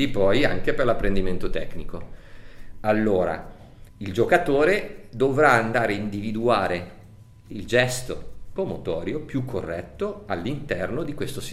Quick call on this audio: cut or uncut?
cut